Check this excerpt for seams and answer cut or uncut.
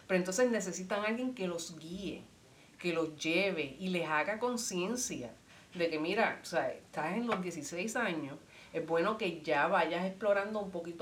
uncut